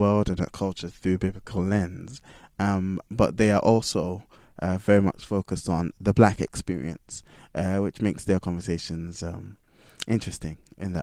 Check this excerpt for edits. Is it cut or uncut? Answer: uncut